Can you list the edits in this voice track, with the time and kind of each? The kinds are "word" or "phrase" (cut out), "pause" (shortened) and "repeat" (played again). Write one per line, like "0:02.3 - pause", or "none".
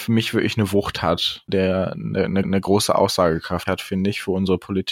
0:01.5 - word
0:02.4 - repeat
0:03.7 - phrase